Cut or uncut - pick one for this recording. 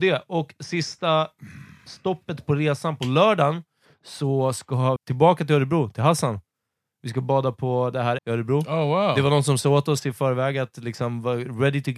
cut